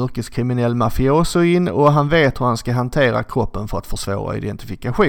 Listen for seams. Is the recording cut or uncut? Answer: uncut